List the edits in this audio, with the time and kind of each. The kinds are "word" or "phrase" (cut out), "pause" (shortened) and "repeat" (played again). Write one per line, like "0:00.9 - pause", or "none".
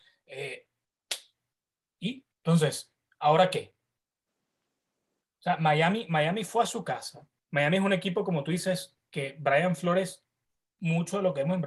0:02.3 - pause
0:07.4 - pause

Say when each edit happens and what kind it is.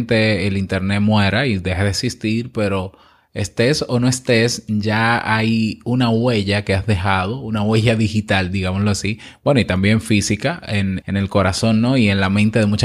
0:11.0 - word

